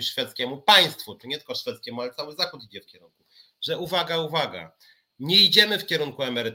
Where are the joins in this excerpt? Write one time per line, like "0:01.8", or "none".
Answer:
0:02.9